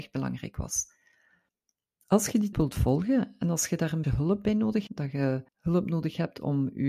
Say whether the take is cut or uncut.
cut